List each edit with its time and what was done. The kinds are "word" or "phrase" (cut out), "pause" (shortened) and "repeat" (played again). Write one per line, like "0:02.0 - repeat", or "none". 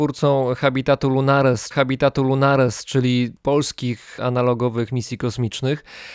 0:01.7 - repeat
0:04.9 - word